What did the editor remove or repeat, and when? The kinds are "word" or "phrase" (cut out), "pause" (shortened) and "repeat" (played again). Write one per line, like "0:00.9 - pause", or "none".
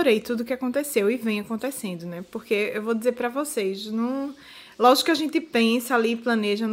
none